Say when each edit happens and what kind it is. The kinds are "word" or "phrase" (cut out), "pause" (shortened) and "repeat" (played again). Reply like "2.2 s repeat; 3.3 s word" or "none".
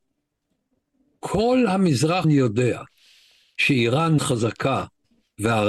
2.2 s word; 4.2 s word